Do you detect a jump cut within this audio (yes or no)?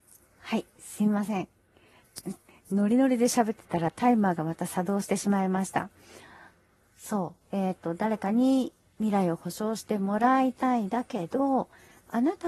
yes